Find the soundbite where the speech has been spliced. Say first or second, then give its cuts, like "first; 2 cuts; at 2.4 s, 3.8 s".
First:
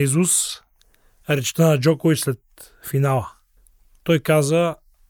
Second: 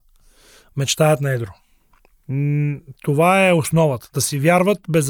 first; 1 cut; at 3.6 s